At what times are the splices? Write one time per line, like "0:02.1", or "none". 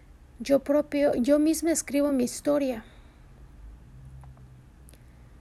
none